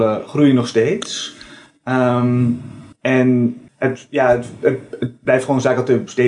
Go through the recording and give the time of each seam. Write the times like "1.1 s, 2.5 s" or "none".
2.9 s